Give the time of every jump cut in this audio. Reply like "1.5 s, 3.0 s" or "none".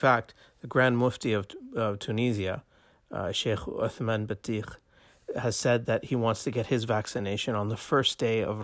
none